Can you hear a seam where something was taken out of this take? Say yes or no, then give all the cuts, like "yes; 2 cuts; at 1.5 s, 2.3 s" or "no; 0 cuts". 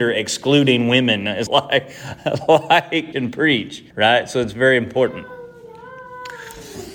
yes; 3 cuts; at 1.5 s, 3.1 s, 3.9 s